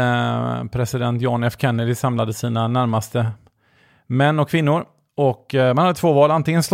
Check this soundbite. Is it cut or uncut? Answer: uncut